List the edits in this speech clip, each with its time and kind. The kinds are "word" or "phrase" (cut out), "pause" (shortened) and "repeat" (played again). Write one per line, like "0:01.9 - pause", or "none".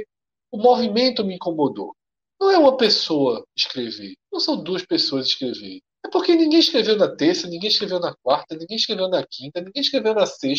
0:04.2 - pause
0:05.9 - pause